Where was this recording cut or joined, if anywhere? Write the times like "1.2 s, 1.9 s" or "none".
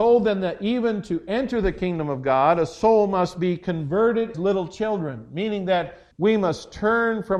4.3 s, 6.1 s